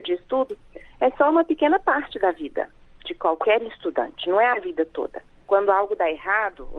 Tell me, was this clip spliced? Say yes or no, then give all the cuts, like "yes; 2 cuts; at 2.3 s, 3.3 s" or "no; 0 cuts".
no; 0 cuts